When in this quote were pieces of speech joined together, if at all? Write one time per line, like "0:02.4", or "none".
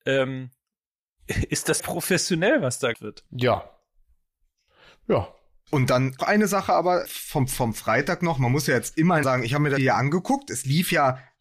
0:01.8
0:02.9
0:06.2
0:07.0
0:09.2
0:09.8